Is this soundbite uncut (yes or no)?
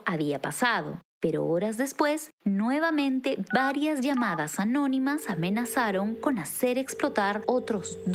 yes